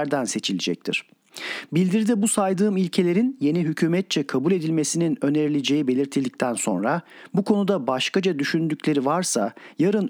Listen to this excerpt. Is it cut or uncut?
uncut